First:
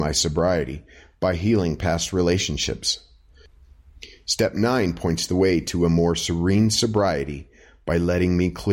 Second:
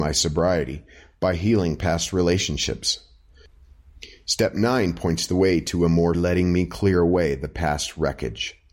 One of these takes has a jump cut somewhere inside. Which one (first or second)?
second